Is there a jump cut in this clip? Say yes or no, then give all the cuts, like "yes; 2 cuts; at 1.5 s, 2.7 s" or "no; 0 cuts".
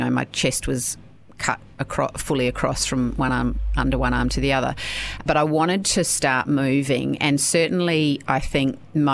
no; 0 cuts